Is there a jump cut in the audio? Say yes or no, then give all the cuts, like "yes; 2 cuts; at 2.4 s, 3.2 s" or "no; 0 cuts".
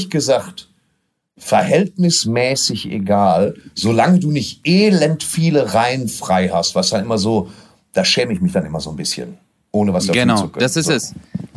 no; 0 cuts